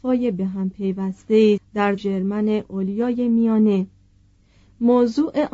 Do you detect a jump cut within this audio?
yes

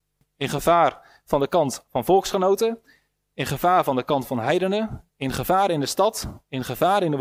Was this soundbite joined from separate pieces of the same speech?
no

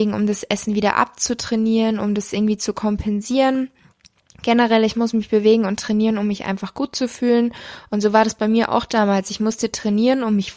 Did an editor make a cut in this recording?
no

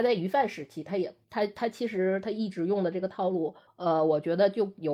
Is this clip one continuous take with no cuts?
no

